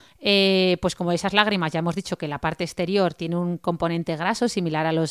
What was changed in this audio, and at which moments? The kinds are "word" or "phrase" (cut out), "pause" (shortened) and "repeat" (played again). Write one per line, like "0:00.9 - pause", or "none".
none